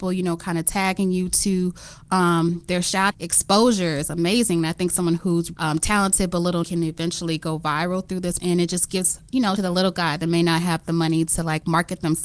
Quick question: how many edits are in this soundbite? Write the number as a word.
five